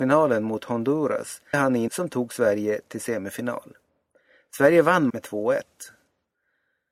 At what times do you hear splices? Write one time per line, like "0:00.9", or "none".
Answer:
0:01.5
0:01.9
0:05.1

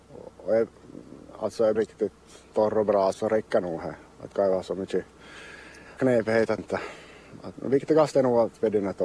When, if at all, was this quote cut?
0:01.8
0:03.1
0:04.3
0:06.0
0:06.6
0:07.5

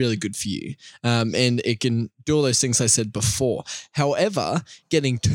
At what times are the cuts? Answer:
none

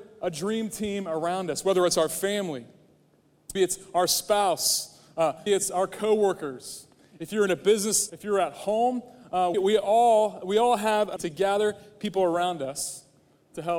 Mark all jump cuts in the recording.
0:03.6
0:05.5
0:08.1
0:09.5
0:11.2

